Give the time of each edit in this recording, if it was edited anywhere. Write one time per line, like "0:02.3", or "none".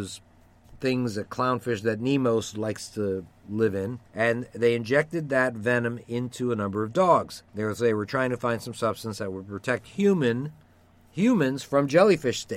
0:04.1
0:07.5